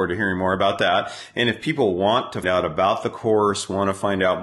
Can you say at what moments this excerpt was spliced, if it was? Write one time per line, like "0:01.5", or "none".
0:02.4